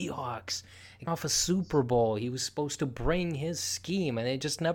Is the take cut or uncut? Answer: cut